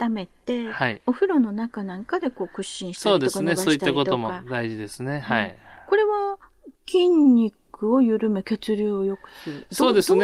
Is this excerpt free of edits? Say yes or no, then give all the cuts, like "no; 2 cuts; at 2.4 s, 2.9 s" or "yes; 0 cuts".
no; 1 cut; at 6.7 s